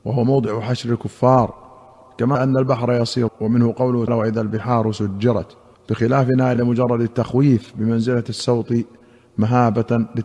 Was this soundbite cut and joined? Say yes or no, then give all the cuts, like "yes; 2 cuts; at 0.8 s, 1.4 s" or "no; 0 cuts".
yes; 5 cuts; at 2.3 s, 3.3 s, 4.1 s, 5.7 s, 6.6 s